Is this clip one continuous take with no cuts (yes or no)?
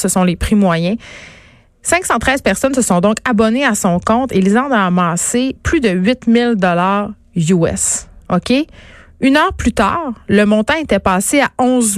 yes